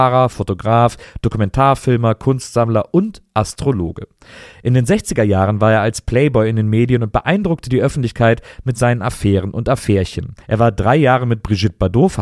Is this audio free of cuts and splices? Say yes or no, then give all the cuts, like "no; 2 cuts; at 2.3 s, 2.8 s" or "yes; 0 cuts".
no; 1 cut; at 10.4 s